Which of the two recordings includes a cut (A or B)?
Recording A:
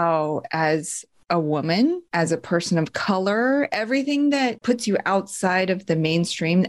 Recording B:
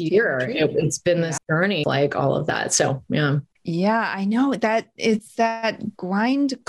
B